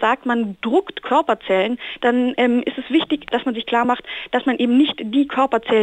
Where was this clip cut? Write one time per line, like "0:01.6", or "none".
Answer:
none